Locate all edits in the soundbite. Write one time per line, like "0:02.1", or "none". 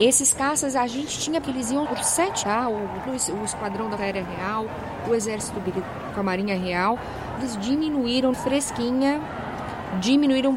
0:01.4
0:01.9
0:02.4
0:03.1
0:04.0
0:06.1
0:07.4
0:08.3